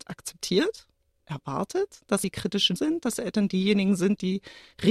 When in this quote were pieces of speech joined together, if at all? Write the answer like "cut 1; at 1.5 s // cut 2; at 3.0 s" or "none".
cut 1; at 1.2 s // cut 2; at 2.2 s // cut 3; at 2.8 s